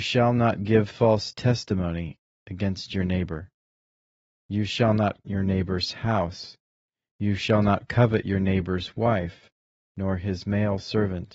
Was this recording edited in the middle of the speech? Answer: yes; 1 cut; at 5.2 s

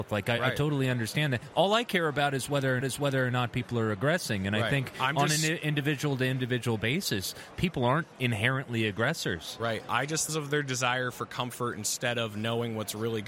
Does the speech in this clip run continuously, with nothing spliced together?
no; 2 cuts; at 2.8 s, 10.3 s

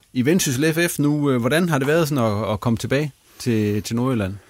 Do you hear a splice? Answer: no; 0 cuts

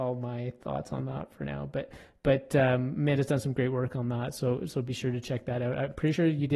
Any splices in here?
no; 0 cuts

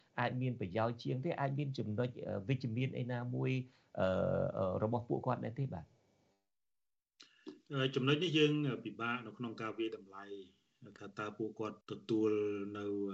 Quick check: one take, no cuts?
no; 1 cut; at 11.8 s

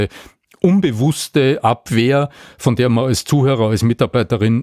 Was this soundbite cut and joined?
no; 0 cuts

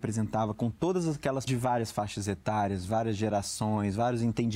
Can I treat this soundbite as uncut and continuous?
no; 1 cut; at 1.5 s

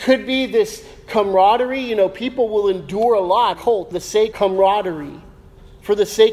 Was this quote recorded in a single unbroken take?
no; 3 cuts; at 3.5 s, 3.9 s, 4.3 s

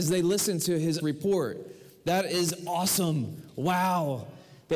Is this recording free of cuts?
no; 1 cut; at 1.0 s

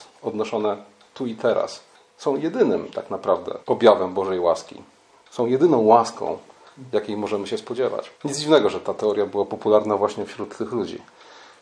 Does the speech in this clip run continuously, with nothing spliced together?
no; 3 cuts; at 1.9 s, 3.6 s, 8.2 s

